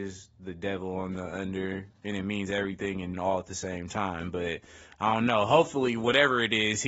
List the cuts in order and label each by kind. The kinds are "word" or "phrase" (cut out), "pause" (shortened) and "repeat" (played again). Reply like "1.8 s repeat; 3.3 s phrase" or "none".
3.1 s word